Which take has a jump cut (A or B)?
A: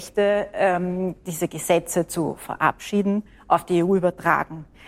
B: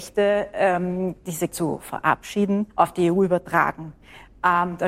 B